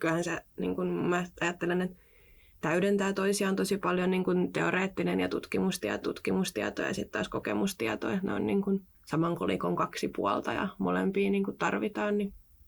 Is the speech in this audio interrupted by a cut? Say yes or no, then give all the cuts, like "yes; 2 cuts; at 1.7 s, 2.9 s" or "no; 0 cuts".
yes; 2 cuts; at 6.0 s, 8.9 s